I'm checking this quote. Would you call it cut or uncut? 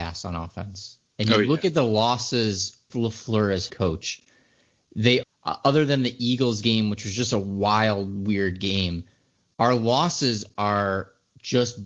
cut